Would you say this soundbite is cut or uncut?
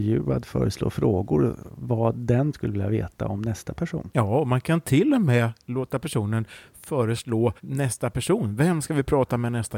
cut